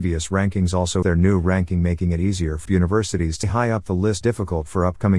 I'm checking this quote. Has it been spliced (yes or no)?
yes